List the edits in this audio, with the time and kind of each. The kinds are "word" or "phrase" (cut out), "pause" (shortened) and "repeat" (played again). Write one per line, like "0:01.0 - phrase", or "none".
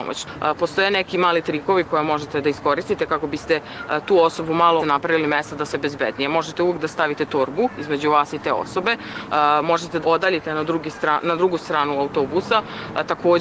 0:04.8 - phrase
0:05.7 - word
0:10.0 - word